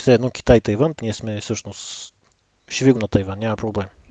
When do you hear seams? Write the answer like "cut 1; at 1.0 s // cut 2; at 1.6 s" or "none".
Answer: cut 1; at 1.0 s // cut 2; at 2.9 s